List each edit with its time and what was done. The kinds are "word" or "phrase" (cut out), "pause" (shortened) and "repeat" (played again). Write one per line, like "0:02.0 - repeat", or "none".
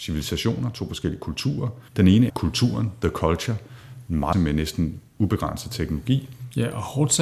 0:01.9 - pause
0:02.3 - word
0:04.3 - phrase